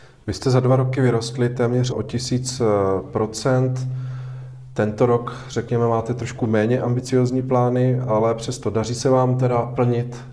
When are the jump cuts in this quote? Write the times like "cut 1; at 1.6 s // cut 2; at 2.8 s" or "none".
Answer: cut 1; at 1.9 s